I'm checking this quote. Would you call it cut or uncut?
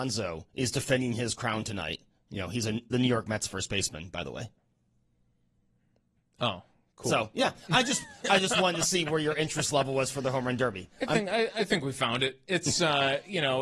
uncut